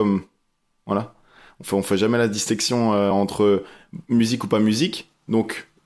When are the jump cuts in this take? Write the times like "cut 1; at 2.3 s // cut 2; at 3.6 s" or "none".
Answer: none